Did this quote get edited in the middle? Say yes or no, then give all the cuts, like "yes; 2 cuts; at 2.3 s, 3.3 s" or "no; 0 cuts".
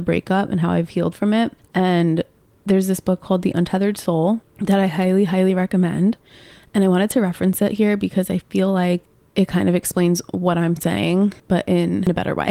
no; 0 cuts